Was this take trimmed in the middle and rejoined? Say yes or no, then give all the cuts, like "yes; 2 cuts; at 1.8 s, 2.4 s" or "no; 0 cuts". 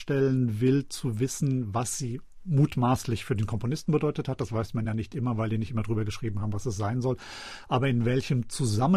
no; 0 cuts